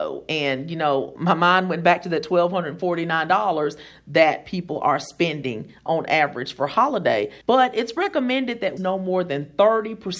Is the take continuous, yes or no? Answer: no